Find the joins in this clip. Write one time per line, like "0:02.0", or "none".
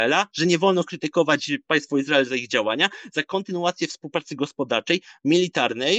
none